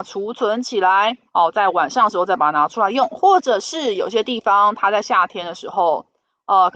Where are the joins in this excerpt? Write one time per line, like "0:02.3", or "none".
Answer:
0:01.3